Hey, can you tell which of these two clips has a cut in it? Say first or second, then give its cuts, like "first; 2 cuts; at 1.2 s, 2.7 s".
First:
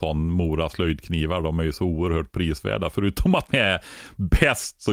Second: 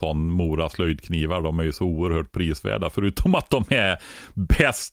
first; 1 cut; at 3.5 s